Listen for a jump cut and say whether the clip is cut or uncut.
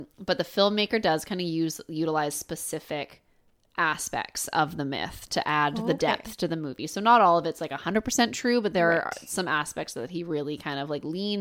uncut